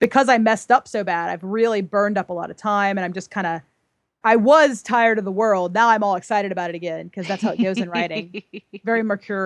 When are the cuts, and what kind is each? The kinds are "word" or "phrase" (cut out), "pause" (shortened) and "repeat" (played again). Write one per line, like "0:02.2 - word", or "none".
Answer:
0:04.2 - word